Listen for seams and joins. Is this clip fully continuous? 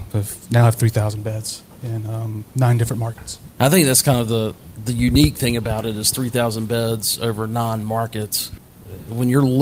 no; 1 cut; at 2.5 s

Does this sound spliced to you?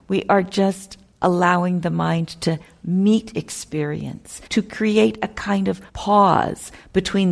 yes; 2 cuts; at 4.5 s, 5.9 s

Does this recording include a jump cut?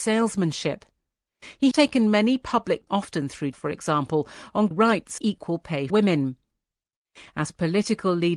yes; 6 cuts; at 1.7 s, 2.9 s, 3.5 s, 4.7 s, 5.2 s, 5.9 s

